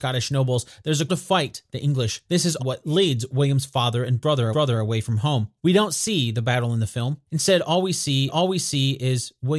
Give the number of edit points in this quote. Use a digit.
7